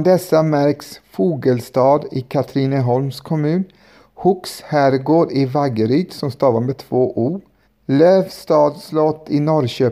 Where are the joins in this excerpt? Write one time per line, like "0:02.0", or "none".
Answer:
0:07.6